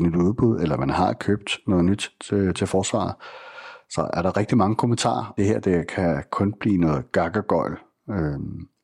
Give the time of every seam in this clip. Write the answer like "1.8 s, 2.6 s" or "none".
5.4 s